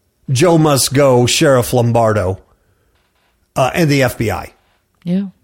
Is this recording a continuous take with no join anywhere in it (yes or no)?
yes